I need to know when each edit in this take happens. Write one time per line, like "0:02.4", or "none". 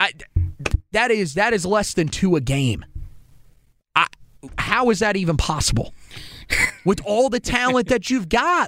none